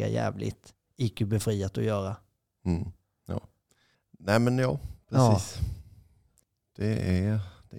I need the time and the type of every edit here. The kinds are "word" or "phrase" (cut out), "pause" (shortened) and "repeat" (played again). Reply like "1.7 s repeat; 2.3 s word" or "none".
none